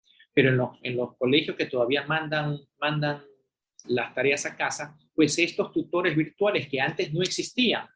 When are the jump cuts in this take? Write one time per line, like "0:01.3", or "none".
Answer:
0:03.8

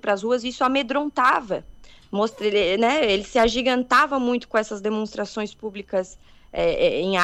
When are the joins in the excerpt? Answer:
none

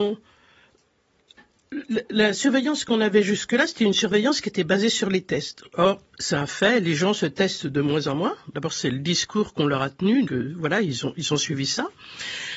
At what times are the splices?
0:10.2

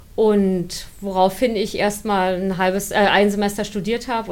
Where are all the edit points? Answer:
none

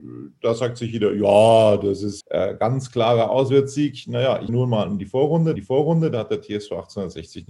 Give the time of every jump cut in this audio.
0:02.2
0:04.5
0:05.6

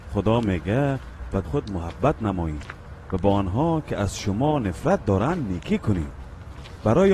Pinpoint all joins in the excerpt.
0:01.4

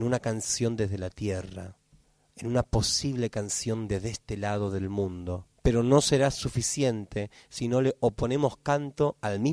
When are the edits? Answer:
0:02.0
0:05.6

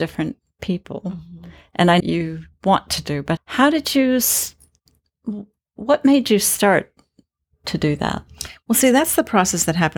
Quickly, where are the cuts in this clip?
0:02.0
0:02.5
0:03.4

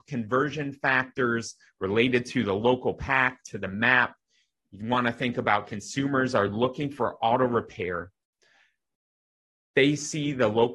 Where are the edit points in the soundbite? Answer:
none

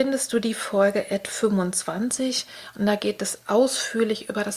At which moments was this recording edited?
none

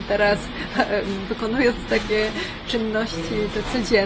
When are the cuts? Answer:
0:01.9

